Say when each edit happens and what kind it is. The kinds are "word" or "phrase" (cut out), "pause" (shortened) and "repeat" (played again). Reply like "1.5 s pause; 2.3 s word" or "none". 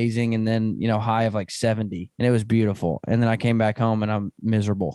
2.1 s pause

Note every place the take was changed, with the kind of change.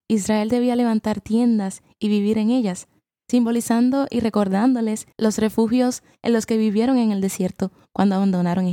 5.1 s pause

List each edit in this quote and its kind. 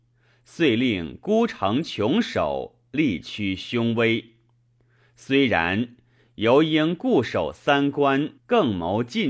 8.4 s pause

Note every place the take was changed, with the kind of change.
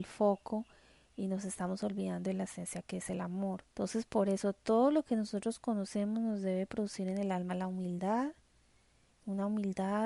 3.7 s pause

